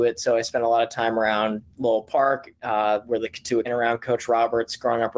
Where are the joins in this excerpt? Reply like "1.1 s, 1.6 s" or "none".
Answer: 1.7 s, 3.6 s